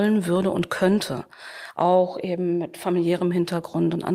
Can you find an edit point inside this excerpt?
no; 0 cuts

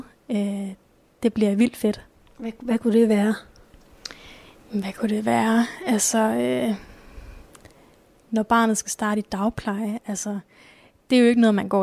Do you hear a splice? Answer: yes; 1 cut; at 2.2 s

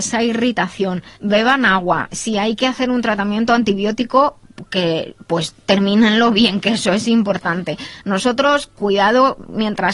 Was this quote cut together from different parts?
yes; 2 cuts; at 1.1 s, 8.7 s

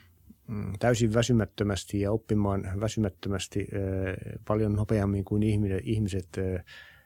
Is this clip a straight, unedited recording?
yes; 0 cuts

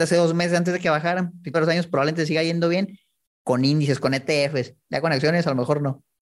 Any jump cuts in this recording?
yes; 1 cut; at 1.5 s

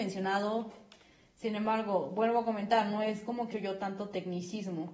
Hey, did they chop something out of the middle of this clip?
yes; 1 cut; at 3.5 s

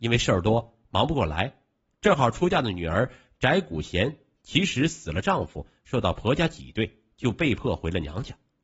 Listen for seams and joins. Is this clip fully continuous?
yes; 0 cuts

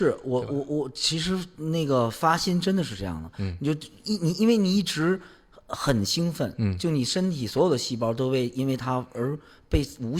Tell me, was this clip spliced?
no; 0 cuts

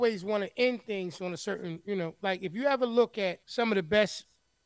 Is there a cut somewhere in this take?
yes; 1 cut; at 3.4 s

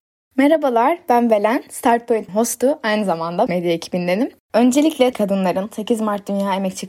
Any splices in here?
yes; 3 cuts; at 2.3 s, 3.5 s, 5.1 s

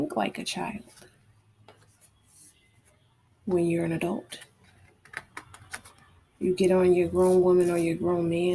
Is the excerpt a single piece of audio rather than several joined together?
yes; 0 cuts

